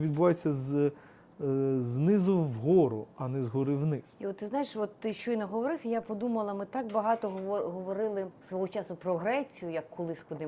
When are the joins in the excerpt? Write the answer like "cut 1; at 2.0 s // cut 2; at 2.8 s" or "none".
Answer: cut 1; at 4.1 s // cut 2; at 8.4 s